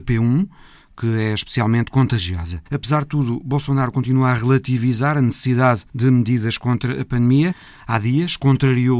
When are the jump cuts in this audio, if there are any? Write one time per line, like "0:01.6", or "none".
0:02.7